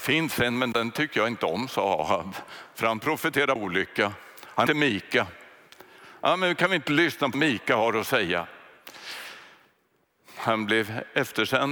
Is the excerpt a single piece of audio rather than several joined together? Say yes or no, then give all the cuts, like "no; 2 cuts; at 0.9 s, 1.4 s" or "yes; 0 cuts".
no; 3 cuts; at 3.6 s, 4.7 s, 7.3 s